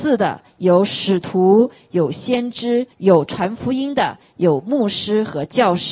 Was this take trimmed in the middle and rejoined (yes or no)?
yes